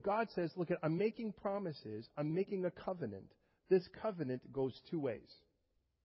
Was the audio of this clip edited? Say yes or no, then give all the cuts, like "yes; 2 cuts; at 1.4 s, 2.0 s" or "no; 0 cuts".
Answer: no; 0 cuts